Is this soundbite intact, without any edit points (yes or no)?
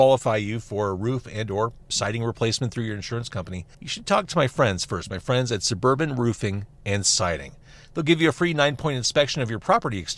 no